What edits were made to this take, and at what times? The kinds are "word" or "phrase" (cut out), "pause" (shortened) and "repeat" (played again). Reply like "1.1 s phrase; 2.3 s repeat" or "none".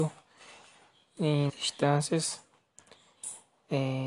1.5 s word